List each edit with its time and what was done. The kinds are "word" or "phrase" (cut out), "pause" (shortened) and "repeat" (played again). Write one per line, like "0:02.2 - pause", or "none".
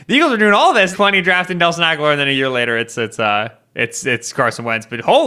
0:00.9 - phrase